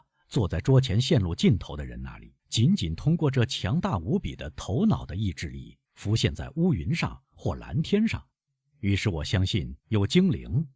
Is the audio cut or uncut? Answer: cut